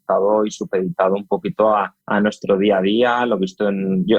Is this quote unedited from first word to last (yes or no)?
no